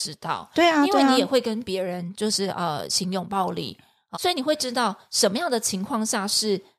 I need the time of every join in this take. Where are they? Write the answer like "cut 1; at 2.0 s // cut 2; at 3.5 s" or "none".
cut 1; at 4.1 s